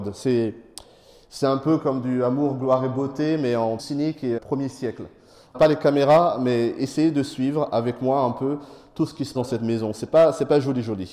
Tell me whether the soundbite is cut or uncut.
cut